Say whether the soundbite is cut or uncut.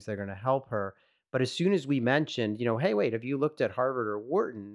uncut